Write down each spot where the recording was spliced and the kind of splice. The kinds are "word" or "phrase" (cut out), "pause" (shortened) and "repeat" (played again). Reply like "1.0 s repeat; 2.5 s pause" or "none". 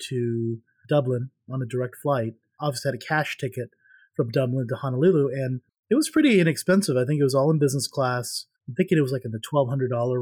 5.7 s pause; 8.6 s pause